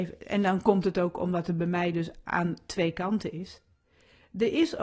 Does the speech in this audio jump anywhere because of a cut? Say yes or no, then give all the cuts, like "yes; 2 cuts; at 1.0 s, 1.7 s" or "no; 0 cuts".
no; 0 cuts